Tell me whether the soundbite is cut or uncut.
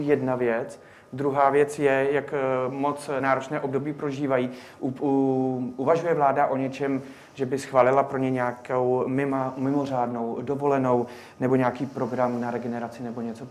uncut